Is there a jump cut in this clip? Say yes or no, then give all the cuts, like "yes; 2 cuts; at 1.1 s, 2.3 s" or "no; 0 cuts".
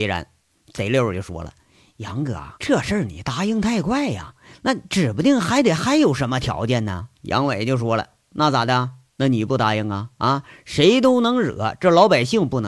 yes; 2 cuts; at 2.5 s, 7.1 s